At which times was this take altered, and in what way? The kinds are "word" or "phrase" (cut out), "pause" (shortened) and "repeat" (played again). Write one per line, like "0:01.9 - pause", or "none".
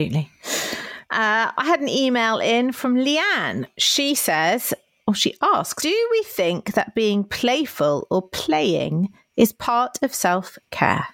0:05.8 - word

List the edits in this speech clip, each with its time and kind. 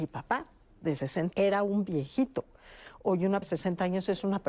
0:01.3 - word
0:03.4 - word

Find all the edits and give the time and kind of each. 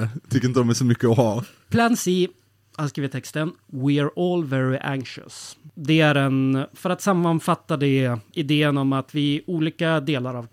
none

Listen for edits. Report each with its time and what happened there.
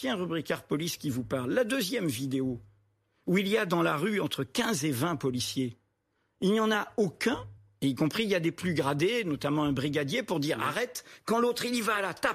none

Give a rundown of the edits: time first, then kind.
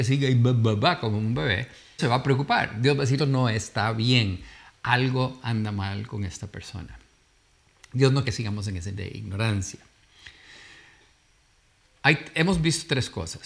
0:02.0 - word
0:03.2 - word
0:08.2 - word
0:08.9 - word

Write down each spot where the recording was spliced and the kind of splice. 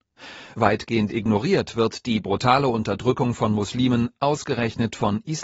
none

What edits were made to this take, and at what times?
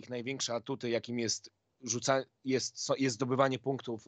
none

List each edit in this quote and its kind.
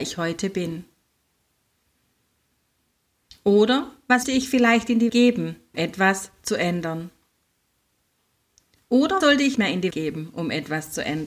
0:04.2 - word
0:05.1 - word
0:05.7 - word
0:09.2 - word
0:09.6 - word
0:09.9 - word

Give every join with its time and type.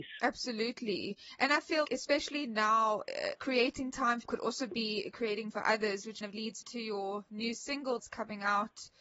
0:01.8 - word
0:03.4 - word
0:04.2 - word
0:05.5 - word
0:06.2 - word
0:06.6 - word
0:08.0 - word

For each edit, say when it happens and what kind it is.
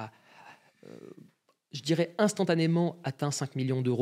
none

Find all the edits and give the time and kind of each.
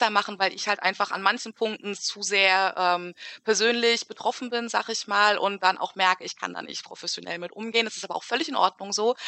0:01.9 - word

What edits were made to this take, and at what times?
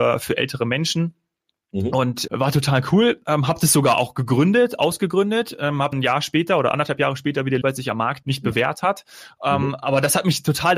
0:02.3 - word
0:05.9 - word
0:07.6 - word
0:08.2 - word

